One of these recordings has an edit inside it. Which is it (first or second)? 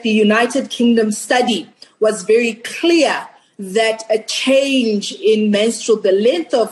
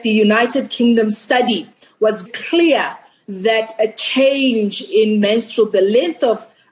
second